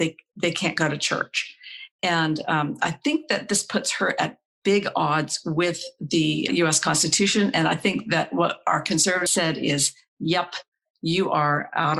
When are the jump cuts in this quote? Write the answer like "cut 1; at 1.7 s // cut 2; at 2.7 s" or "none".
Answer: cut 1; at 6.5 s // cut 2; at 9.3 s